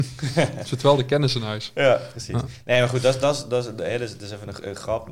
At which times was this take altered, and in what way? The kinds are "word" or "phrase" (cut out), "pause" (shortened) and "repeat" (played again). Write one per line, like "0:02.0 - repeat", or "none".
none